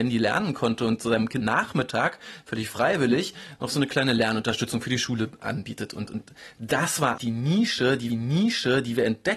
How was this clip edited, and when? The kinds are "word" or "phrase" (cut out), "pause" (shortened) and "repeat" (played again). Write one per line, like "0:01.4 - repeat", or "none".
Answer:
0:01.4 - word
0:06.1 - word
0:07.2 - word
0:08.1 - repeat